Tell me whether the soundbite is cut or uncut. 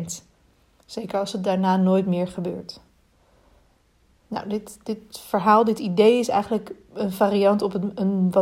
uncut